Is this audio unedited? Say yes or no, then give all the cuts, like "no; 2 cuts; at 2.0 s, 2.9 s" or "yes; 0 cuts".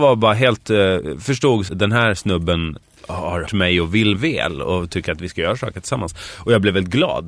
no; 3 cuts; at 1.7 s, 3.5 s, 4.1 s